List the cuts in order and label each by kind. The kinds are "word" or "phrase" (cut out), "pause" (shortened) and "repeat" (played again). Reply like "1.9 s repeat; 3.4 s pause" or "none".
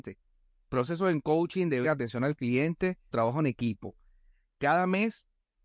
1.8 s word; 3.1 s word